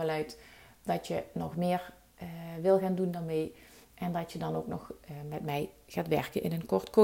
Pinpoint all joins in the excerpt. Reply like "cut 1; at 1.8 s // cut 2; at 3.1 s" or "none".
none

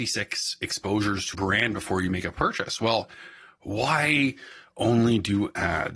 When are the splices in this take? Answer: cut 1; at 1.3 s

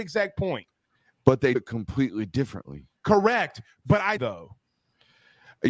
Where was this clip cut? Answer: cut 1; at 1.0 s // cut 2; at 1.5 s // cut 3; at 4.2 s

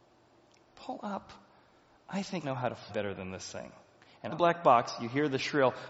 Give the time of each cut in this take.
cut 1; at 2.4 s // cut 2; at 2.9 s // cut 3; at 4.3 s

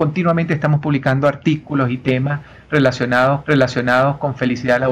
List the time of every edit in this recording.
cut 1; at 3.4 s

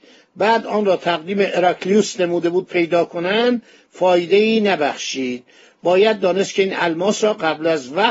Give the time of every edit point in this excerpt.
none

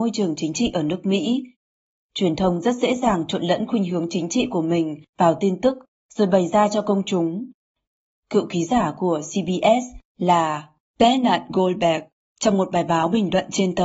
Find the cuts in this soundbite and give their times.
none

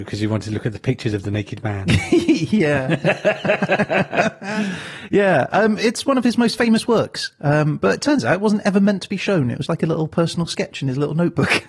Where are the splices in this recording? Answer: cut 1; at 9.7 s

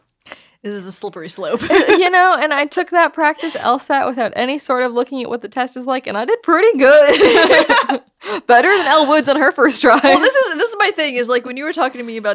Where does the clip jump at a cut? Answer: none

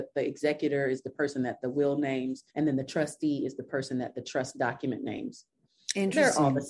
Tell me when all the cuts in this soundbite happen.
cut 1; at 2.5 s

